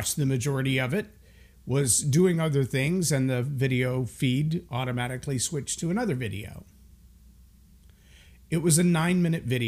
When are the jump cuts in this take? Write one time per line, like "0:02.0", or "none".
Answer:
none